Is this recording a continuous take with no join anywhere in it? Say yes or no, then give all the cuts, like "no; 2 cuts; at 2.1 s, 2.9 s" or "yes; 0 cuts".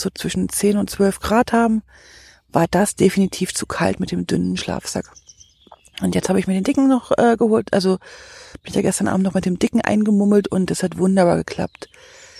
yes; 0 cuts